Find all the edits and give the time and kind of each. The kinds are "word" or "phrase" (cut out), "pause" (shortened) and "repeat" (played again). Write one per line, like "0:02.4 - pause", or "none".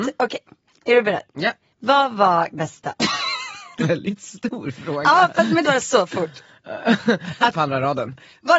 0:02.5 - word
0:03.0 - pause
0:03.8 - word
0:05.6 - phrase
0:07.5 - phrase